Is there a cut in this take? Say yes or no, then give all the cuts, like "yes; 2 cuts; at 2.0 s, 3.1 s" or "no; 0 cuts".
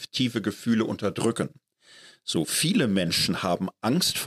no; 0 cuts